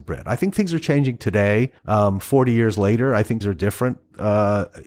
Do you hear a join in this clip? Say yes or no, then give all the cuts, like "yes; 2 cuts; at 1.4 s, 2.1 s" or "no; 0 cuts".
yes; 2 cuts; at 1.8 s, 3.4 s